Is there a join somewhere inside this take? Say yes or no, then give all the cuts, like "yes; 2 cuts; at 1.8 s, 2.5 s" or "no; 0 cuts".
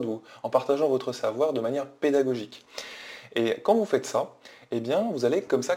no; 0 cuts